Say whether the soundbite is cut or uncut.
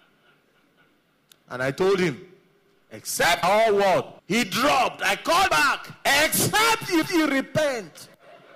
cut